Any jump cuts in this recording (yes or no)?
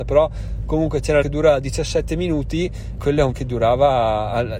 yes